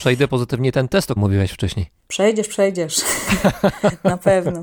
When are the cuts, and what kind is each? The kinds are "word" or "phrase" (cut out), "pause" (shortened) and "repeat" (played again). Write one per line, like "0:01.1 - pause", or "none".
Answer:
0:01.2 - word